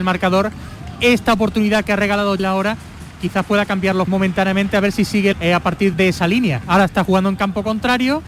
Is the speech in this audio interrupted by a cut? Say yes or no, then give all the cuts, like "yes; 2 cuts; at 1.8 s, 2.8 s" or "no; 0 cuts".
yes; 4 cuts; at 2.4 s, 4.1 s, 5.3 s, 5.9 s